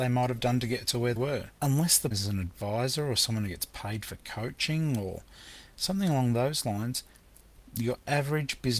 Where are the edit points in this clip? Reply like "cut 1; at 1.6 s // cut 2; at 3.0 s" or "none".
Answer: cut 1; at 1.2 s // cut 2; at 1.6 s // cut 3; at 2.1 s